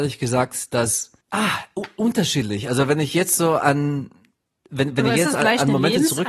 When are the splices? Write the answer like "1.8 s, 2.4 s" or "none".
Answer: 1.2 s